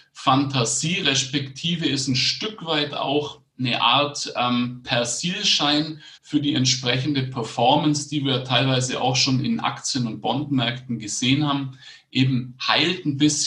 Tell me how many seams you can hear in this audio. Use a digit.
1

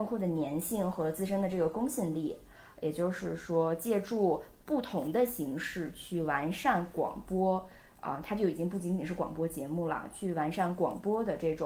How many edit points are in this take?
0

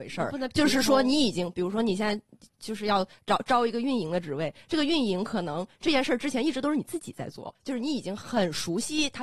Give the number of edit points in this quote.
1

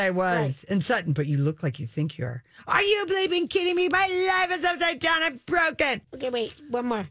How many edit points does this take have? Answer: 1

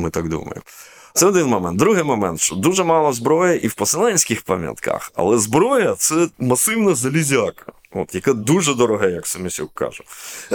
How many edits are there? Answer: 1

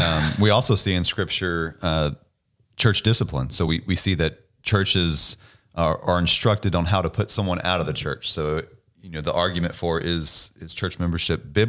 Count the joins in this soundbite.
0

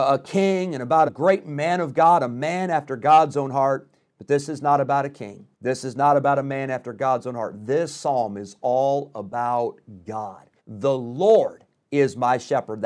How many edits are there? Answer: 3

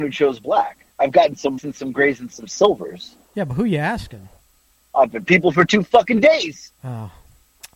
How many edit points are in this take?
5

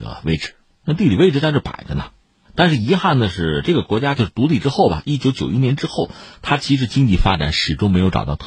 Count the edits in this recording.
1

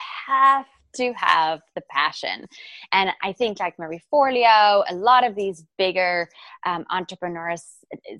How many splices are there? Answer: 0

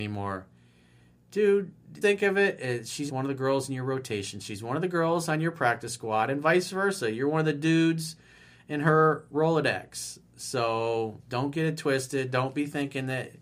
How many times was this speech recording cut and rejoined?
2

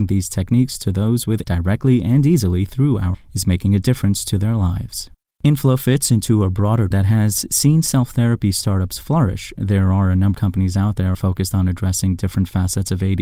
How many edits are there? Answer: 6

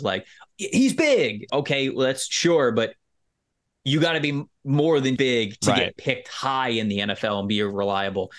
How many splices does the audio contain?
2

